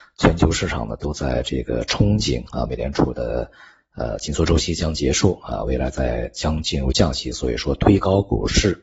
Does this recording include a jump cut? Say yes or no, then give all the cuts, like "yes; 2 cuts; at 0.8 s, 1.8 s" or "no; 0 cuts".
no; 0 cuts